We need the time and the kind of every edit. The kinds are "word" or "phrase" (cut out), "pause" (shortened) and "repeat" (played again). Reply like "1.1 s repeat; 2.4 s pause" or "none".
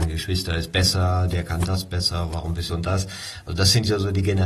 2.7 s phrase